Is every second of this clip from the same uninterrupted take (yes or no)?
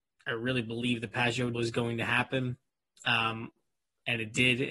no